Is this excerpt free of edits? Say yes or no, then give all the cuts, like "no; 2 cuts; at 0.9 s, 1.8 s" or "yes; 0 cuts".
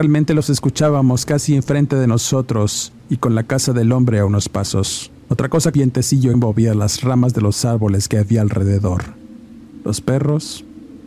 no; 4 cuts; at 3.0 s, 5.2 s, 5.7 s, 6.3 s